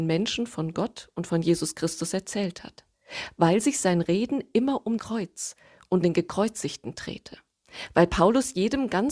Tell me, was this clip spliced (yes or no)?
yes